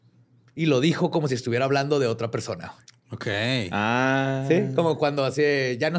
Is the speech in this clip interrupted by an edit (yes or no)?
no